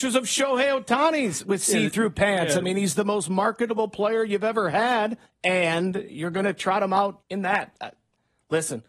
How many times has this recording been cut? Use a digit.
2